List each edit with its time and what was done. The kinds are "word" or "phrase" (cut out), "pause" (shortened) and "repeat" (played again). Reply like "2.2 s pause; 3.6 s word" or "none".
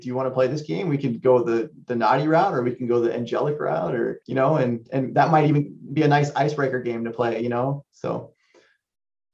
4.2 s pause